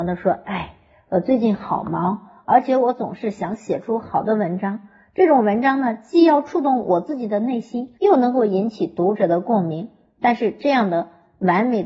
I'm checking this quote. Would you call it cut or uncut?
cut